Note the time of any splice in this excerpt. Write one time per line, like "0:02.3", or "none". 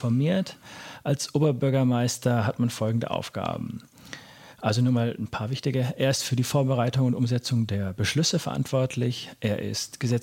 none